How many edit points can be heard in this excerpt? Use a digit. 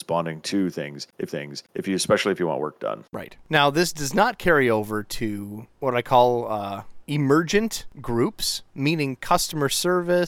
1